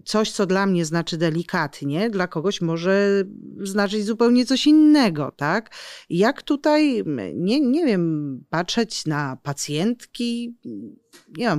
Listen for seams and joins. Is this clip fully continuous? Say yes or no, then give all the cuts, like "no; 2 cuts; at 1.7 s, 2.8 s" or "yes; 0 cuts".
yes; 0 cuts